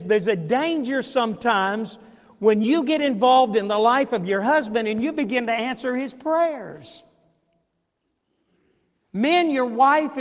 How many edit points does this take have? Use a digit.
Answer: 0